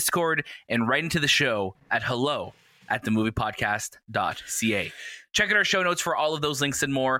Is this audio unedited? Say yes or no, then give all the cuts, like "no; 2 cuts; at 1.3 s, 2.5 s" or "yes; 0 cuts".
yes; 0 cuts